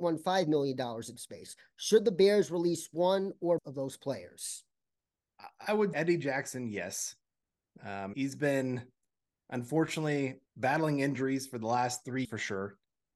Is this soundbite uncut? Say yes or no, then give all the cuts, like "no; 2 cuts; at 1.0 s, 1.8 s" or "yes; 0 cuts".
no; 6 cuts; at 1.2 s, 3.6 s, 5.9 s, 8.1 s, 10.5 s, 12.2 s